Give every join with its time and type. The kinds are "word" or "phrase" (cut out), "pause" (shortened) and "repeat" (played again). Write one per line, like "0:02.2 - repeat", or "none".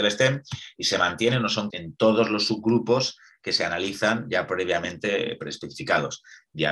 0:01.7 - word